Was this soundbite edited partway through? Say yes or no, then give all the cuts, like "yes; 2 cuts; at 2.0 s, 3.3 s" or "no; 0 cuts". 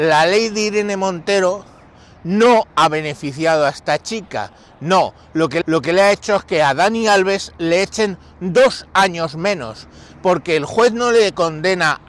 yes; 1 cut; at 5.6 s